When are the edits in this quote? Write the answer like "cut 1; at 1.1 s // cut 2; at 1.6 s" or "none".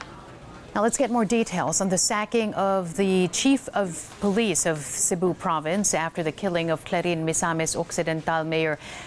none